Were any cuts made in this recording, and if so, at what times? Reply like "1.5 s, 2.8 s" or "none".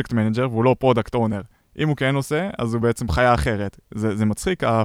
none